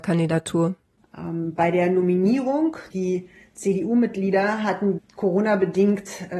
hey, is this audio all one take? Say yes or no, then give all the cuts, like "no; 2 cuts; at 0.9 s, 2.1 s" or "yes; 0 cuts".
no; 2 cuts; at 2.9 s, 5.0 s